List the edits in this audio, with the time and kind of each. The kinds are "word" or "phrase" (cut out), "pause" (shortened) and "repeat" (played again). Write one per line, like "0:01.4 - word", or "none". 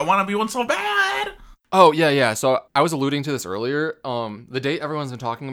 0:02.7 - pause